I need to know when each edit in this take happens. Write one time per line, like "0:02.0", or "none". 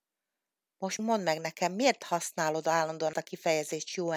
0:01.0
0:03.1